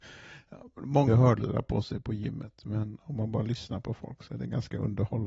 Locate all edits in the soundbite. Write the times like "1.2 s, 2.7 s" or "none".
1.1 s

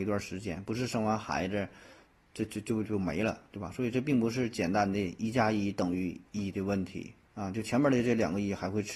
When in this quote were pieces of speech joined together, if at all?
7.2 s

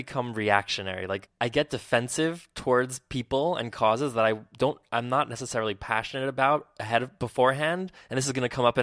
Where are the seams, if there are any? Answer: none

